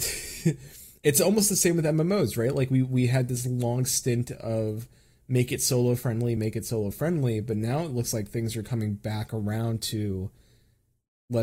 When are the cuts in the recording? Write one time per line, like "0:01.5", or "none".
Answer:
none